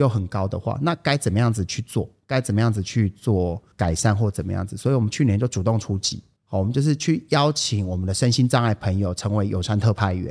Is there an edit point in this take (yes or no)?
yes